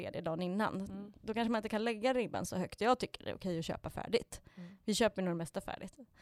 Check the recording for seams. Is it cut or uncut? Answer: uncut